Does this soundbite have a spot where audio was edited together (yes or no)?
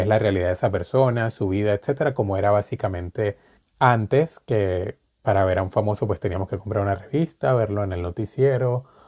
yes